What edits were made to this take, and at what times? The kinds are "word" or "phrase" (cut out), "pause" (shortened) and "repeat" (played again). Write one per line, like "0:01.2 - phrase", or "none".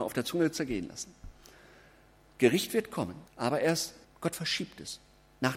0:03.3 - pause
0:04.0 - pause